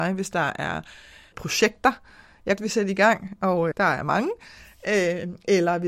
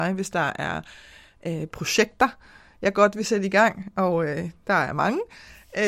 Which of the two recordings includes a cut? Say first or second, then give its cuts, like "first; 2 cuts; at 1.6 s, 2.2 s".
first; 3 cuts; at 1.3 s, 2.6 s, 3.7 s